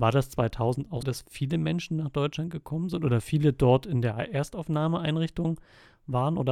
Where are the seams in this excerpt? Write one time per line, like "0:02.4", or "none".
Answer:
0:01.0